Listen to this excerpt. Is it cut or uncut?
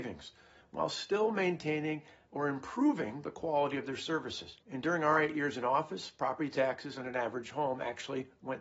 cut